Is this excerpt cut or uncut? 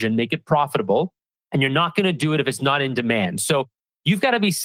uncut